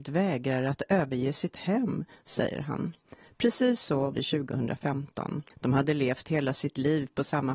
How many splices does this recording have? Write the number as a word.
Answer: two